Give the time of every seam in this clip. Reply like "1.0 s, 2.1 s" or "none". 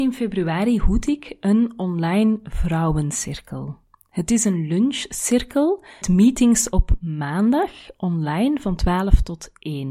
6.0 s